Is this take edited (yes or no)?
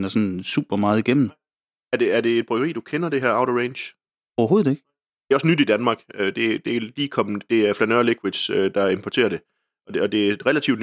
no